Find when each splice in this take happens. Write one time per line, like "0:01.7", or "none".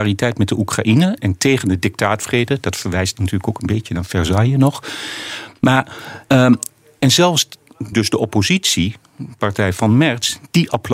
0:01.2
0:06.2
0:07.9